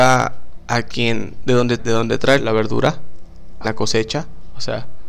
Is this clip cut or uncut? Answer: cut